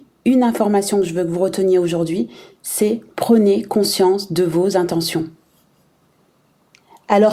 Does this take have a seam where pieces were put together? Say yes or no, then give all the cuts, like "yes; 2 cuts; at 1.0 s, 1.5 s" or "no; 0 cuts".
yes; 1 cut; at 3.1 s